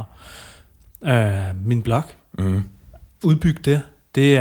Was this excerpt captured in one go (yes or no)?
yes